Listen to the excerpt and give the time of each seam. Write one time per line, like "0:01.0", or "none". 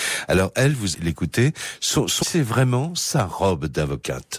0:00.9
0:02.2